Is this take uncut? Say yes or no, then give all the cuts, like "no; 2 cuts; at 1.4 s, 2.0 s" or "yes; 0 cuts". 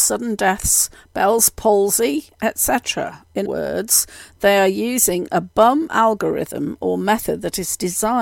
no; 2 cuts; at 1.0 s, 3.4 s